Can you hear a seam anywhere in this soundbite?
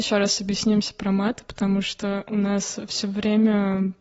no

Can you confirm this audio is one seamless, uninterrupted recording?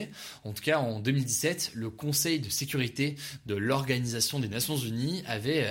yes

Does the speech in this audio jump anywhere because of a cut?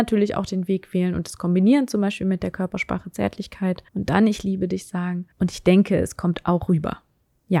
yes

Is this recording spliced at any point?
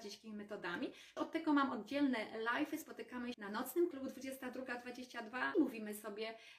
yes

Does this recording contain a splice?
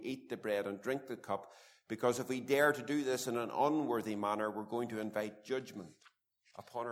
no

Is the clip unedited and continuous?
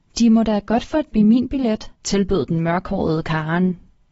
no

